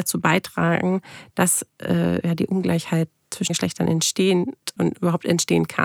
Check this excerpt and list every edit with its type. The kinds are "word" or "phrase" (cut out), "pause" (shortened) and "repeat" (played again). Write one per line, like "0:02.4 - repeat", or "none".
0:03.5 - word
0:04.8 - word